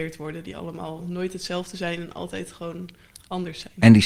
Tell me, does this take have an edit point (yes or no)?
no